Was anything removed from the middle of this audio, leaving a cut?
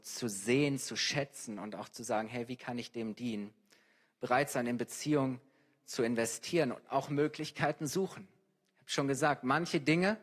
no; 0 cuts

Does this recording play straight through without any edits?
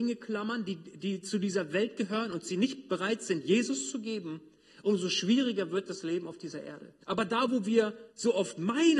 no; 2 cuts; at 7.0 s, 8.1 s

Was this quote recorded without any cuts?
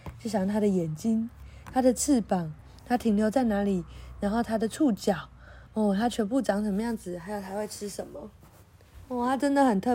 yes; 0 cuts

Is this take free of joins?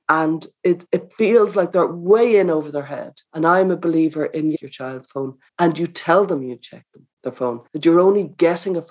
no; 6 cuts; at 1.7 s, 3.2 s, 4.5 s, 5.5 s, 7.1 s, 7.7 s

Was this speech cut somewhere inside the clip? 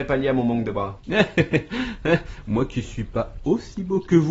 no; 0 cuts

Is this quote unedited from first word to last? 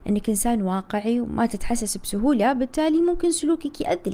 yes; 0 cuts

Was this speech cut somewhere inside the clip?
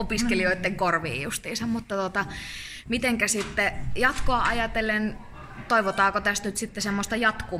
no; 0 cuts

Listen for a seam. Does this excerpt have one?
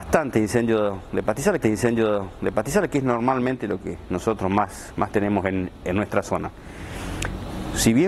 yes; 2 cuts; at 1.6 s, 5.8 s

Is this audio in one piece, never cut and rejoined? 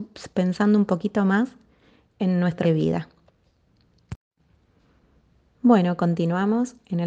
no; 1 cut; at 2.6 s

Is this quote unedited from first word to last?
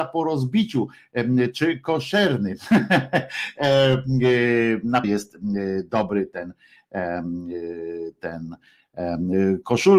no; 1 cut; at 5.0 s

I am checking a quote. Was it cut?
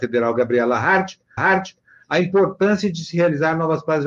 yes; 1 cut; at 1.4 s

